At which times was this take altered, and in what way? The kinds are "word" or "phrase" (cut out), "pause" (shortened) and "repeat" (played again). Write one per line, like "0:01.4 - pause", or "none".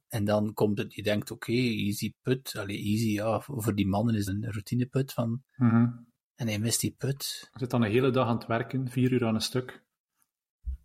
0:04.3 - word
0:06.2 - pause